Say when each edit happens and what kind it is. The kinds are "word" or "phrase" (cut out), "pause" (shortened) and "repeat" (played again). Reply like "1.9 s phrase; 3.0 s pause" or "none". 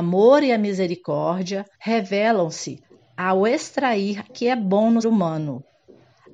1.7 s pause; 4.3 s word; 5.0 s word

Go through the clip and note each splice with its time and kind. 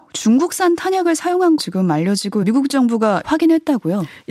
1.6 s word; 2.4 s word; 3.2 s word

